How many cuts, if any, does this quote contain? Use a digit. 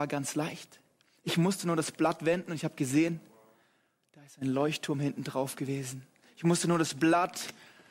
0